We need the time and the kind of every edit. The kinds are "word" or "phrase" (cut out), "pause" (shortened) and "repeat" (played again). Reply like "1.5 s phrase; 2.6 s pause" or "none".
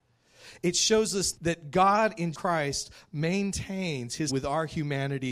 1.3 s word; 2.3 s word; 4.3 s word